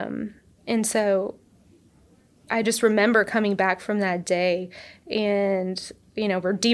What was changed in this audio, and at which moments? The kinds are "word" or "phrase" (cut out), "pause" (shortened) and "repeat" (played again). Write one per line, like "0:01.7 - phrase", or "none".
none